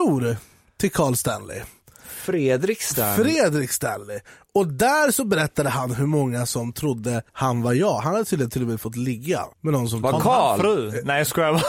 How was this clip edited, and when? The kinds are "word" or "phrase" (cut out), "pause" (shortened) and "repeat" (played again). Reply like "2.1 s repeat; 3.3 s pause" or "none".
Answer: 7.3 s pause; 9.5 s pause